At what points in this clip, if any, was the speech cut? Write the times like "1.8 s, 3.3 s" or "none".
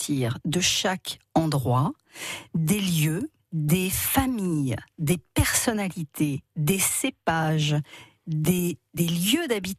3.4 s